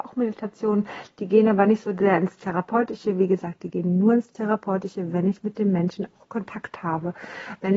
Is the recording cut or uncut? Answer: uncut